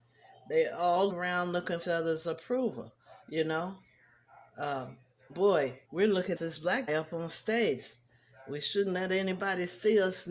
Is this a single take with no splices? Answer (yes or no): no